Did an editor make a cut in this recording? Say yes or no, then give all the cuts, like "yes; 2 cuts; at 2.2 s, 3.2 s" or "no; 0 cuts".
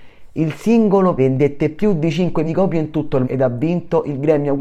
yes; 3 cuts; at 1.2 s, 2.4 s, 3.2 s